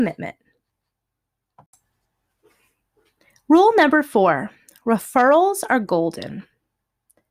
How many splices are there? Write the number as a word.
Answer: zero